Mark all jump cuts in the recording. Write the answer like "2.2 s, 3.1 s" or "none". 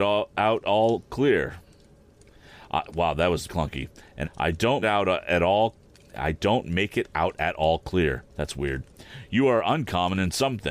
3.5 s, 4.2 s, 4.8 s, 8.3 s